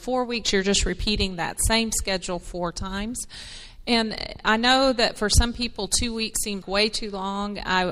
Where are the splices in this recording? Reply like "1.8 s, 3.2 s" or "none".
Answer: 6.6 s